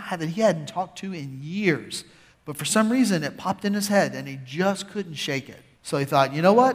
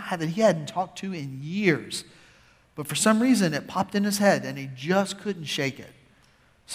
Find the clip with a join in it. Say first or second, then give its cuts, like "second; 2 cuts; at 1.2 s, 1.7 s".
first; 2 cuts; at 2.3 s, 5.7 s